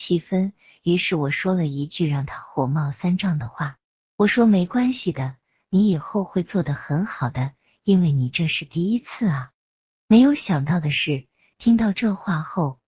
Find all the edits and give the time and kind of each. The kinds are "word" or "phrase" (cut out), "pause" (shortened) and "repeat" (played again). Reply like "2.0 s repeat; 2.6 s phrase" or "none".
none